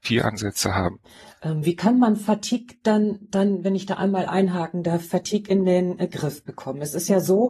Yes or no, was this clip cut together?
no